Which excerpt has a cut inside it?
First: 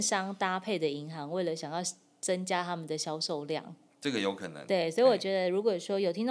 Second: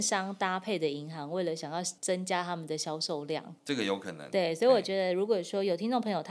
second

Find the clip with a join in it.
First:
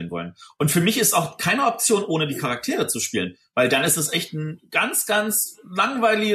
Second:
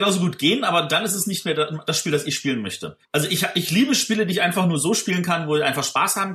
second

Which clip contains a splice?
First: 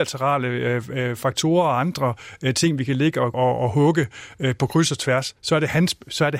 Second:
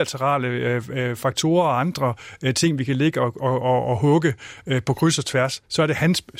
first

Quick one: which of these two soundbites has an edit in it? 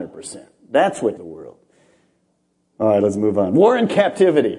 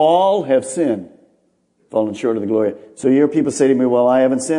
first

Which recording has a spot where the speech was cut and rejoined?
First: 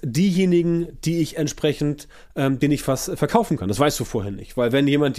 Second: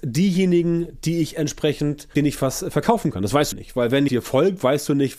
second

